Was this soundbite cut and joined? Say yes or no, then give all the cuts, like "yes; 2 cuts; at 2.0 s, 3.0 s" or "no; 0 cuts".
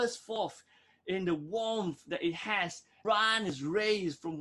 yes; 1 cut; at 3.0 s